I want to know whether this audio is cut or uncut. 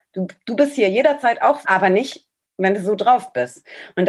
cut